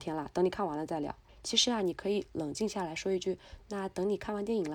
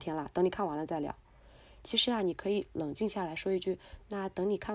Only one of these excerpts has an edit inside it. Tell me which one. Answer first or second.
first